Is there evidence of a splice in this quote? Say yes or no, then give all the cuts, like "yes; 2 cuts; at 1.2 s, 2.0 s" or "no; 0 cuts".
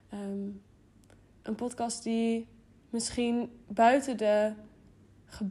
yes; 1 cut; at 2.7 s